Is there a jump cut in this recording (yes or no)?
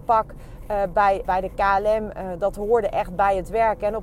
yes